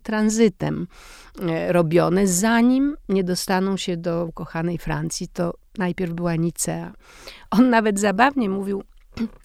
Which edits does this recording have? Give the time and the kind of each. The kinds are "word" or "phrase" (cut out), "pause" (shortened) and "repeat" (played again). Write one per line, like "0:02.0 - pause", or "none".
0:04.3 - word